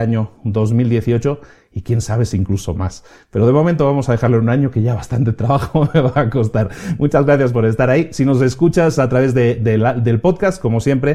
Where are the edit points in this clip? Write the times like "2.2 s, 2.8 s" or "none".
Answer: none